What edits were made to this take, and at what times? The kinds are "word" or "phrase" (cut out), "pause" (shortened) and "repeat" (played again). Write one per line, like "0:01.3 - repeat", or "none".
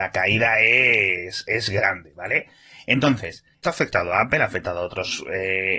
0:03.6 - word